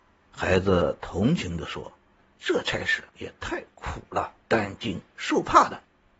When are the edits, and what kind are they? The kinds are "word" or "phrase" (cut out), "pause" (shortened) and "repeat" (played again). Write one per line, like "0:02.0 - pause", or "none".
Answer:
0:03.1 - pause
0:04.4 - pause